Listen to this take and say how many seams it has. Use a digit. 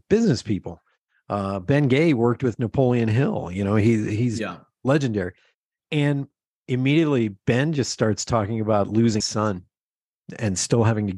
1